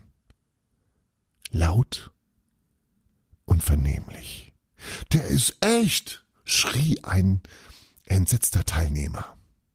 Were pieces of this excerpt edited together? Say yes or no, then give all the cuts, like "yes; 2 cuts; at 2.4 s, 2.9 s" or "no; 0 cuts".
no; 0 cuts